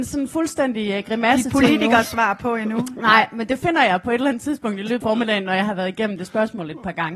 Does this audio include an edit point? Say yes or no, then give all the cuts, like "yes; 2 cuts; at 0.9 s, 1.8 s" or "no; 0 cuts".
yes; 1 cut; at 5.0 s